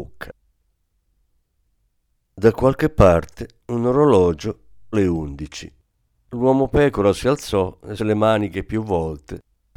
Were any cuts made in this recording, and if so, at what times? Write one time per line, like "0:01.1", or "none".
0:04.9
0:08.0